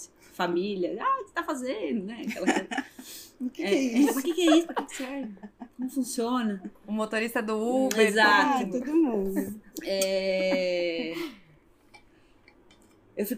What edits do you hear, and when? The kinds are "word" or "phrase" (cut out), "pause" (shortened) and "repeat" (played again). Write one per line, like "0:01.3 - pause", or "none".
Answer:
none